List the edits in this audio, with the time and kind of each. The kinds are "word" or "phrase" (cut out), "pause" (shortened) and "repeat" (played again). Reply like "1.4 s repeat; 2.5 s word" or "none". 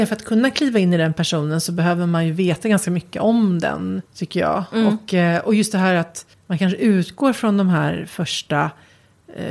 4.1 s pause; 6.3 s pause

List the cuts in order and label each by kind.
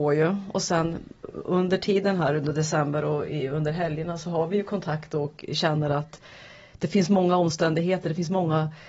none

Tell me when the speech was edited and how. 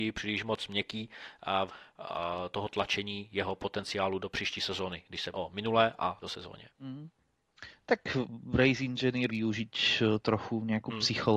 1.7 s phrase; 4.2 s word; 5.3 s word; 6.2 s word; 6.7 s pause; 9.3 s word

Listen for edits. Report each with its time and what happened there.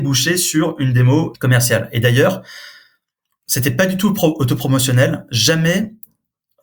1.3 s phrase

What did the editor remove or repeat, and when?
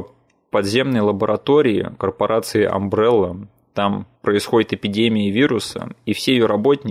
4.1 s pause

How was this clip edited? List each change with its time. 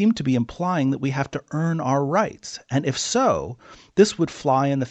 none

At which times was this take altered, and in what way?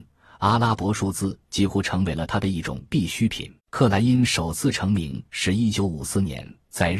3.6 s pause

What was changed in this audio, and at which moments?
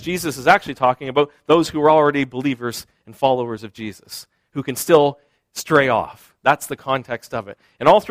none

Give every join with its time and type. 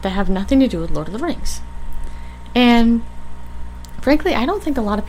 none

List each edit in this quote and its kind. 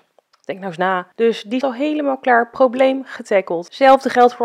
1.6 s word

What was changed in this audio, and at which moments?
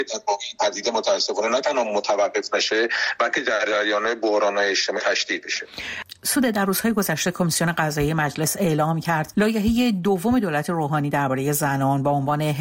5.0 s word; 9.3 s word

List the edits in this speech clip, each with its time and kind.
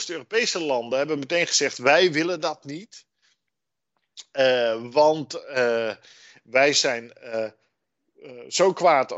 none

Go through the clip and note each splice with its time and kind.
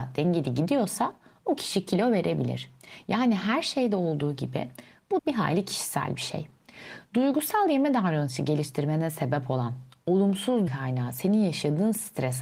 5.2 s word; 10.7 s word

